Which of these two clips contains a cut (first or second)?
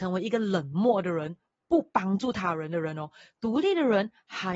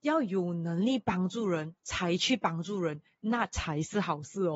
second